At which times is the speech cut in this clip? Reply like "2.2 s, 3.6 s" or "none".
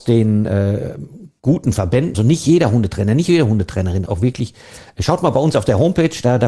2.1 s, 4.1 s